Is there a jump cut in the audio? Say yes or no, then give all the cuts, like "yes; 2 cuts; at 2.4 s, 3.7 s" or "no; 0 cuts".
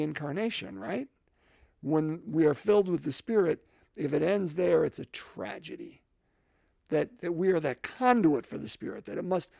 no; 0 cuts